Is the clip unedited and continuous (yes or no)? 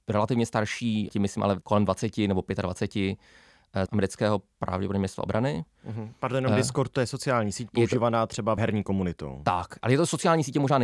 no